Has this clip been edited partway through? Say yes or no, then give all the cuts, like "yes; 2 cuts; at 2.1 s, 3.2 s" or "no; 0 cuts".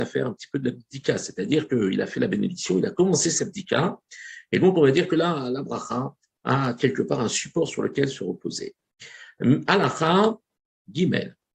no; 0 cuts